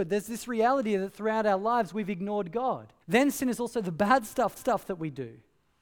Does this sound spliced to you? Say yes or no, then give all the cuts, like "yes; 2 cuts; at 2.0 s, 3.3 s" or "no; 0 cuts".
yes; 2 cuts; at 3.0 s, 4.6 s